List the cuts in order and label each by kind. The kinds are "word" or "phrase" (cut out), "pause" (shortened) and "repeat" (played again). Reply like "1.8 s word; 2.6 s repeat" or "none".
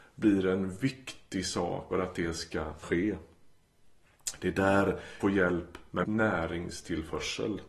1.9 s word; 2.8 s word; 5.2 s word; 6.0 s word